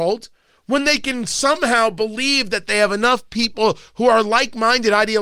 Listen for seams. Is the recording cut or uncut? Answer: uncut